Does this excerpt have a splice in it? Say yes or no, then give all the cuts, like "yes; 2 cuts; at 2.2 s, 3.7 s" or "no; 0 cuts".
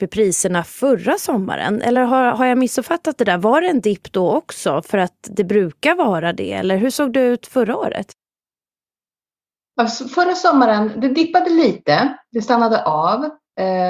no; 0 cuts